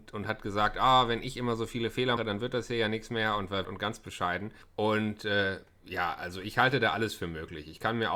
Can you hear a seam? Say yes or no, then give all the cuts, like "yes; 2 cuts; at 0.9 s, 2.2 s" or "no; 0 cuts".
yes; 3 cuts; at 2.2 s, 3.6 s, 4.6 s